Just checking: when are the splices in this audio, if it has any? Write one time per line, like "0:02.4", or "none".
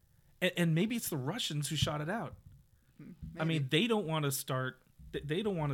none